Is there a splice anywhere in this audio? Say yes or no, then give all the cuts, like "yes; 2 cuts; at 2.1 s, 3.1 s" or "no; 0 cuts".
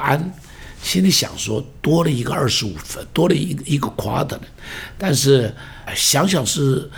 yes; 1 cut; at 5.9 s